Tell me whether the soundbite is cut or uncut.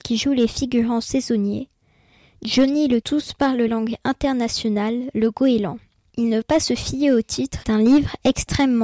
cut